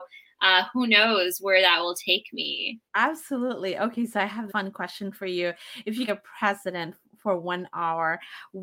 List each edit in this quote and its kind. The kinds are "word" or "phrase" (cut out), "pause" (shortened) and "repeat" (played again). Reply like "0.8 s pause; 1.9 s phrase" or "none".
2.9 s pause; 4.5 s word; 6.1 s phrase